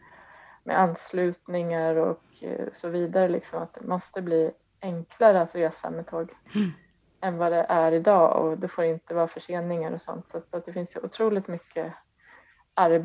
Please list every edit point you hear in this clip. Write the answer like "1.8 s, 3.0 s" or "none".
none